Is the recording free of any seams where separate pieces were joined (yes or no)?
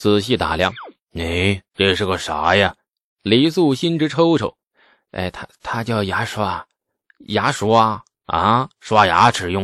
no